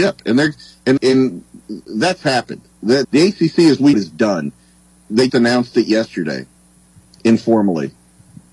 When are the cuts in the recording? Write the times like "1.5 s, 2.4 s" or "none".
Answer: 1.0 s, 3.0 s, 3.9 s, 5.3 s

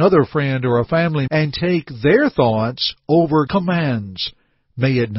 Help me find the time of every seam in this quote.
1.3 s, 3.5 s

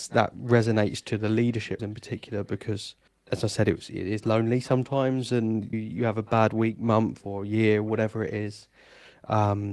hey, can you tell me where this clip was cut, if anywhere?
1.8 s, 3.1 s, 5.7 s

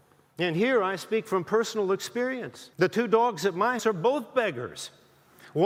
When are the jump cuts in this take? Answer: 2.7 s, 3.8 s

